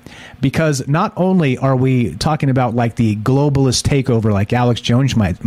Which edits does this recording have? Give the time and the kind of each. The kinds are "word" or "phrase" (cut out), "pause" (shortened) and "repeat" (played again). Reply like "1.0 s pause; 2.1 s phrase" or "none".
none